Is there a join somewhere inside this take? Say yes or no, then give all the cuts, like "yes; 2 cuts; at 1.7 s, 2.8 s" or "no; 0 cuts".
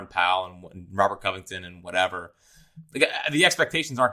no; 0 cuts